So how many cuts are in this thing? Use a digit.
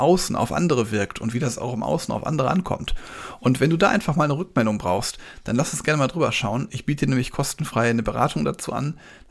0